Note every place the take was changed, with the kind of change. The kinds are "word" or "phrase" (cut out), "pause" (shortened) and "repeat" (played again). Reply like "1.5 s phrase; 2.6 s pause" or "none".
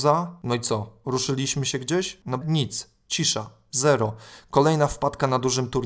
2.4 s phrase

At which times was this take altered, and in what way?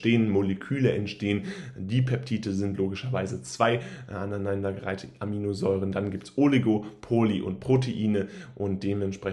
none

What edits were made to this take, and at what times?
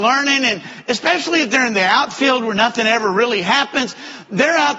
none

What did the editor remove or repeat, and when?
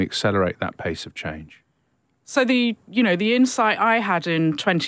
none

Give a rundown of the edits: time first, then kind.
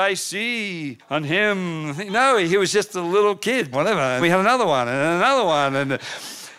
1.0 s pause; 3.7 s phrase; 4.2 s word

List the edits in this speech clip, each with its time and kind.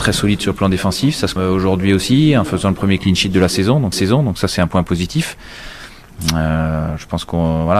1.4 s word; 3.9 s repeat

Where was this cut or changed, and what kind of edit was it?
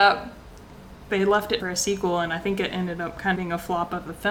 1.1 s word; 1.6 s word; 3.3 s word

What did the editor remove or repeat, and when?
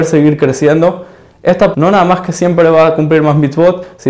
1.7 s word

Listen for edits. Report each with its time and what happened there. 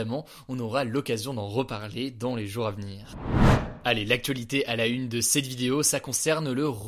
none

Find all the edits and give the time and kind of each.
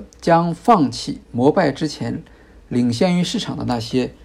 none

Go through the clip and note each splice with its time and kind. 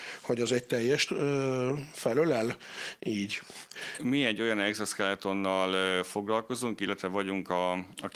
1.1 s word

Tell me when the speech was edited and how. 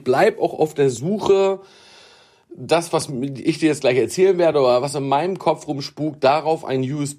none

